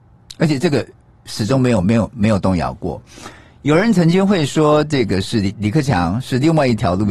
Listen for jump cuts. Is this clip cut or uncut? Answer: uncut